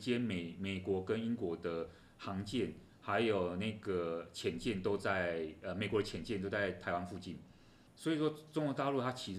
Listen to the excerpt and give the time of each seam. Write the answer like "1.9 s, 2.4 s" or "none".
7.9 s